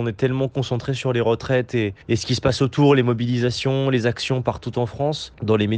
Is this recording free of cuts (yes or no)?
no